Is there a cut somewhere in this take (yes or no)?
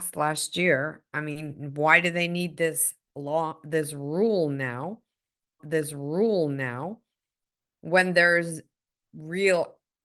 yes